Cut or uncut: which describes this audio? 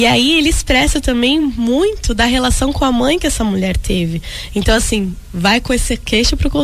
uncut